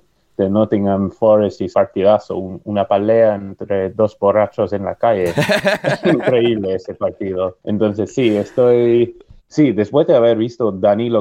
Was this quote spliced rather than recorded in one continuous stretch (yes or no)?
yes